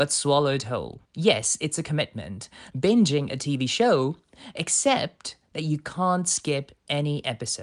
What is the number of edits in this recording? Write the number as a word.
two